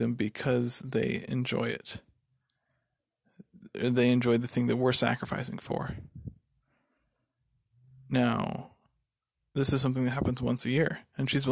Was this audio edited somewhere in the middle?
no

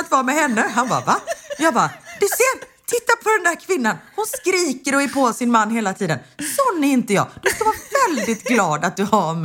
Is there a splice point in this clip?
no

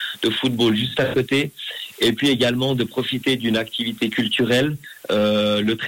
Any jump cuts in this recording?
no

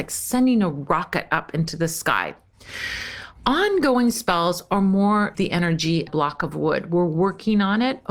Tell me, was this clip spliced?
yes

